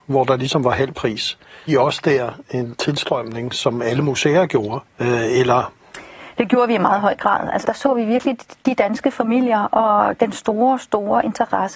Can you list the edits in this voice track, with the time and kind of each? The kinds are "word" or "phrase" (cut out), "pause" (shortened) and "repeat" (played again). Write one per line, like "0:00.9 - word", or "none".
0:01.7 - word
0:04.9 - pause
0:07.6 - word